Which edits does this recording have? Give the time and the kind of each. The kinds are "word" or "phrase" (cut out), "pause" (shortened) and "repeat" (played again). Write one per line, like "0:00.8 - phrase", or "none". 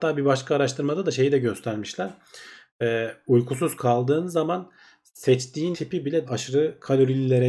0:05.7 - word
0:06.2 - word